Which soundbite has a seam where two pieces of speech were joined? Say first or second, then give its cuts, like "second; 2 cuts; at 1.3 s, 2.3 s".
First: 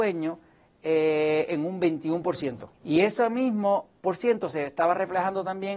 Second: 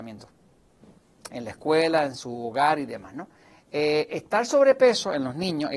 first; 1 cut; at 2.7 s